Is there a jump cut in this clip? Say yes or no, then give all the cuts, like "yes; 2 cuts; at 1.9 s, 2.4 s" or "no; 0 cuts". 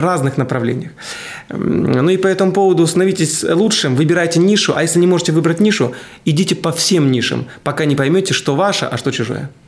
no; 0 cuts